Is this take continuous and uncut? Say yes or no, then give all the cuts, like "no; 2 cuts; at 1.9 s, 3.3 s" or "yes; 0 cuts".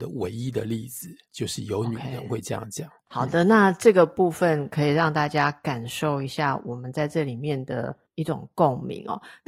no; 2 cuts; at 1.3 s, 8.1 s